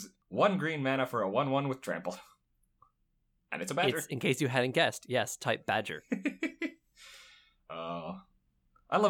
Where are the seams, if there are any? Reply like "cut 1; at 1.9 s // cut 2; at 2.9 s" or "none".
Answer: none